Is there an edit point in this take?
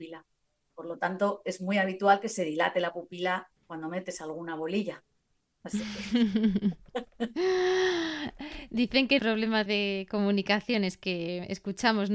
yes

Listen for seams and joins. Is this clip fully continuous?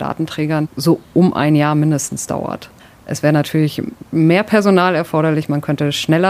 yes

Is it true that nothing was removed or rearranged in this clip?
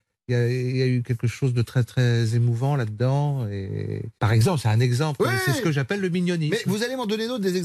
no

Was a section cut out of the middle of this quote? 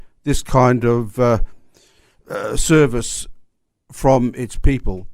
no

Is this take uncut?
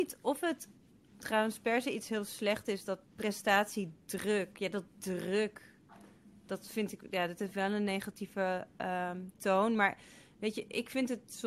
no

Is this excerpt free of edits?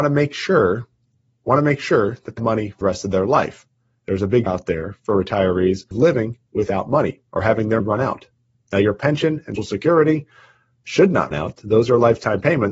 no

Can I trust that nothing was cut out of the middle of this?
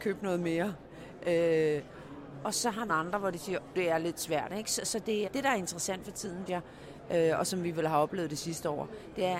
no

